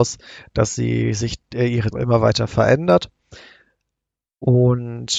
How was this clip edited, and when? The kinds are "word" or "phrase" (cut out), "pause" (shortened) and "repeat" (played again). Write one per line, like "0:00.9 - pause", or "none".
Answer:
0:01.9 - phrase